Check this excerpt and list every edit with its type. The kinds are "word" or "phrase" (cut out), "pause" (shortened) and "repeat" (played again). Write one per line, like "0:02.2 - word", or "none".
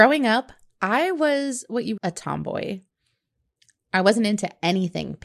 0:02.0 - phrase